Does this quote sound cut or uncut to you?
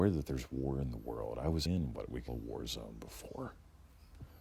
cut